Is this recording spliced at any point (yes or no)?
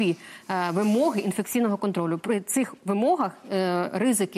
no